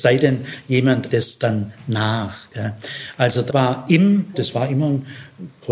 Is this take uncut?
no; 3 cuts; at 1.1 s, 3.5 s, 4.3 s

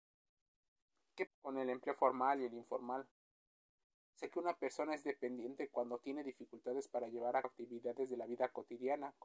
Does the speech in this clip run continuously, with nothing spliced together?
no; 3 cuts; at 1.3 s, 4.3 s, 7.4 s

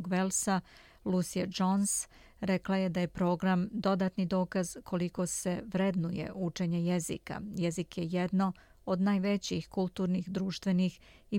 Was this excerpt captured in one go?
yes; 0 cuts

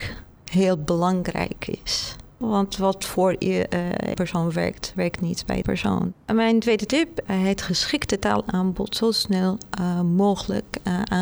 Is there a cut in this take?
yes; 4 cuts; at 4.1 s, 5.6 s, 6.2 s, 7.3 s

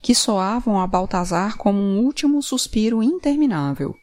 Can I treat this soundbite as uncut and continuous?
yes; 0 cuts

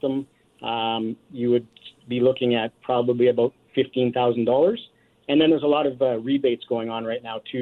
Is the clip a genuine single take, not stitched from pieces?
yes; 0 cuts

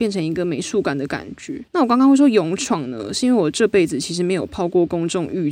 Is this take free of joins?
no; 1 cut; at 1.7 s

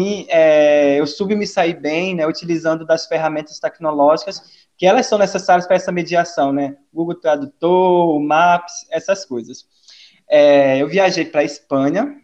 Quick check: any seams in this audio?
no; 0 cuts

